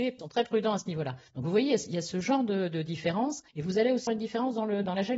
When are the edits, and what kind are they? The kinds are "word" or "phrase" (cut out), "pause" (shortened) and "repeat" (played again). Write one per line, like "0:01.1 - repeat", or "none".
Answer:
0:03.5 - pause
0:04.1 - word